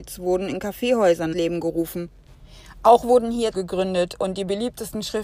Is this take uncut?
no; 2 cuts; at 1.3 s, 3.5 s

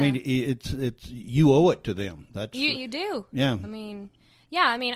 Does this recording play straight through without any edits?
no; 1 cut; at 2.7 s

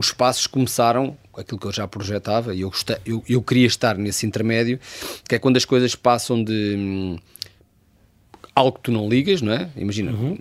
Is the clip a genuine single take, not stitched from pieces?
yes; 0 cuts

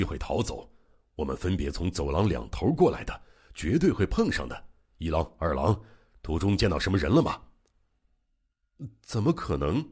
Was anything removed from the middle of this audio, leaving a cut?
no; 0 cuts

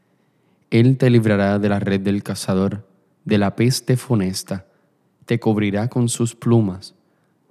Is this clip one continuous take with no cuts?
yes; 0 cuts

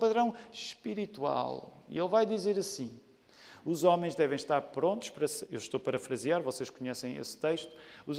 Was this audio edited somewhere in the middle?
no; 0 cuts

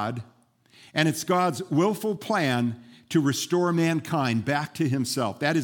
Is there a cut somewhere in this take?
no; 0 cuts

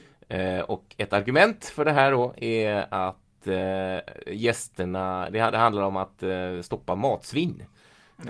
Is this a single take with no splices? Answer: yes; 0 cuts

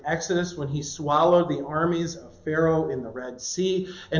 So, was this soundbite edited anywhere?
no; 0 cuts

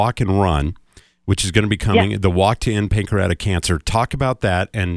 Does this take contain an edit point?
no; 0 cuts

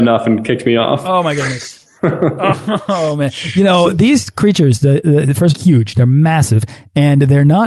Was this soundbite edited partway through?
yes; 2 cuts; at 2.0 s, 5.5 s

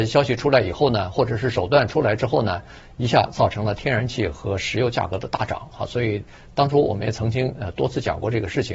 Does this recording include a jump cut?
no; 0 cuts

